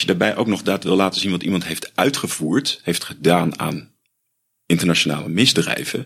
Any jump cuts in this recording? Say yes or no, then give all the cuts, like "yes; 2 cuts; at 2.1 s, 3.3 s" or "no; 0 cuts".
no; 0 cuts